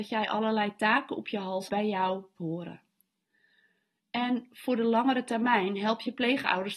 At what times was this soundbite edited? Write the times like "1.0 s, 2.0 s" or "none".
1.7 s, 2.4 s